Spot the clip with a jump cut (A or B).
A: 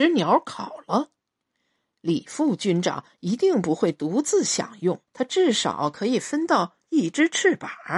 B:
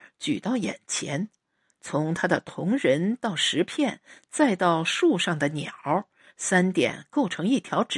A